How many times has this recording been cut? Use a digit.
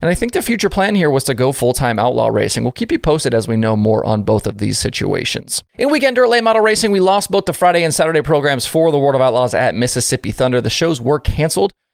1